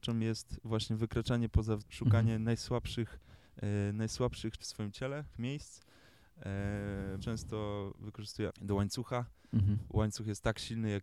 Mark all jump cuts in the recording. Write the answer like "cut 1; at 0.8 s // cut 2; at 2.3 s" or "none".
cut 1; at 1.8 s // cut 2; at 3.4 s // cut 3; at 4.6 s // cut 4; at 5.3 s // cut 5; at 7.2 s // cut 6; at 8.5 s